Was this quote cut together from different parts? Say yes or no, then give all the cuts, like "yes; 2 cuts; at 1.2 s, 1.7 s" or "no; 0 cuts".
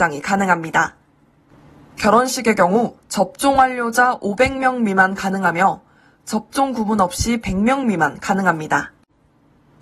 no; 0 cuts